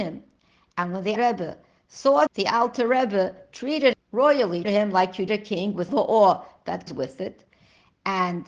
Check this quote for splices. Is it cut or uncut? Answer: cut